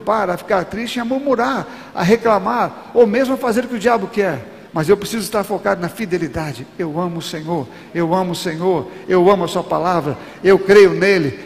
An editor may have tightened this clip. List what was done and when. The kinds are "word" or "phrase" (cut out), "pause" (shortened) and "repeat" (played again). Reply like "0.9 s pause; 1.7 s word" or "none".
4.7 s pause

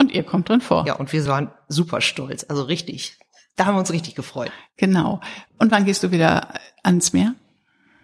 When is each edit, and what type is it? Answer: none

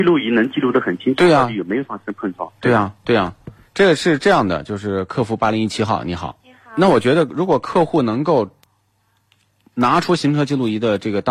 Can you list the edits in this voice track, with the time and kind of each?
6.4 s pause

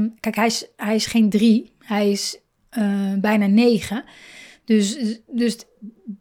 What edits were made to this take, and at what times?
none

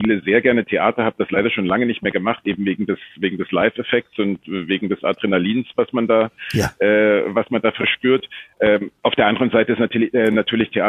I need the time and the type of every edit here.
9.0 s pause

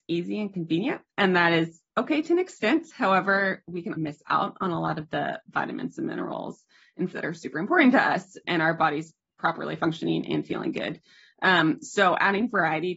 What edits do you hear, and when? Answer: 4.0 s word; 7.1 s word; 8.4 s word

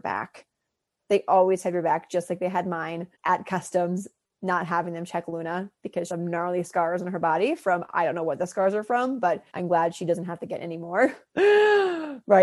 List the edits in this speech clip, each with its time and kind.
3.1 s pause; 6.1 s phrase; 9.5 s pause

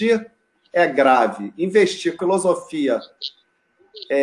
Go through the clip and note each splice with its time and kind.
2.2 s word

